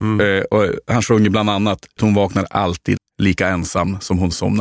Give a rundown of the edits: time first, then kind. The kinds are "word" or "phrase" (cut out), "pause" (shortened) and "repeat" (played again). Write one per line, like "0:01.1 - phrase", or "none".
0:02.0 - word
0:03.0 - word